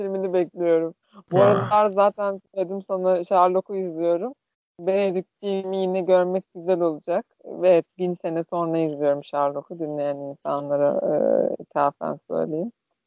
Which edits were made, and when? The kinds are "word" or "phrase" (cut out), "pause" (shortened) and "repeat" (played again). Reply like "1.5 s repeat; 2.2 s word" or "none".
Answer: 1.0 s pause; 2.5 s pause; 4.5 s pause; 7.3 s pause

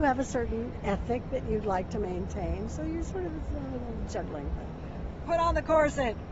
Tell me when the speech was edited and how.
none

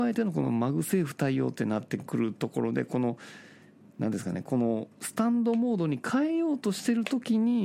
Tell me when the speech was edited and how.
none

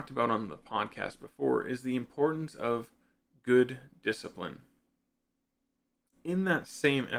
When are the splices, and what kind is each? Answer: none

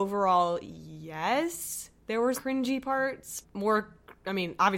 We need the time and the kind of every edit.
2.3 s word; 3.4 s word

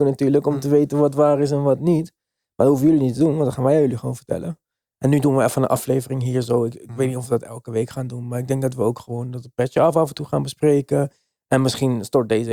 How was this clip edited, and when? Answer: none

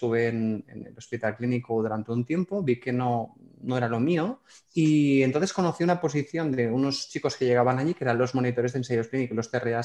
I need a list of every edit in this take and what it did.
4.5 s pause

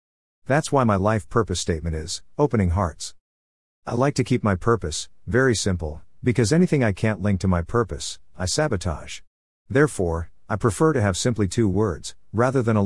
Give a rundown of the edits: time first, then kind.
none

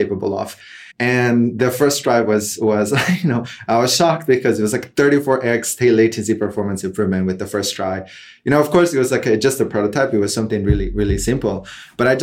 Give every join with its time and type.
0.9 s pause

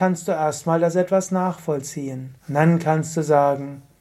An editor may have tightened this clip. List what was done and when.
2.4 s pause

